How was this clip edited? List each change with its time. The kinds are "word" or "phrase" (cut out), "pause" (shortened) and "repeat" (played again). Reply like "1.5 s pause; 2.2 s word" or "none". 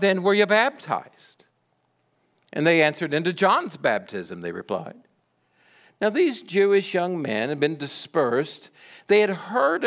none